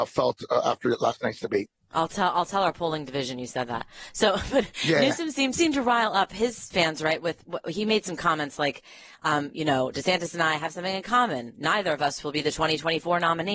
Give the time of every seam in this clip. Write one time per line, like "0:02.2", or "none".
0:05.5